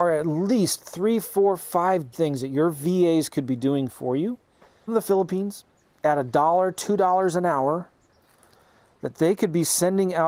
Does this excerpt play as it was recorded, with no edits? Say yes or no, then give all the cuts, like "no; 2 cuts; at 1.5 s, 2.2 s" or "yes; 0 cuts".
no; 2 cuts; at 2.1 s, 4.9 s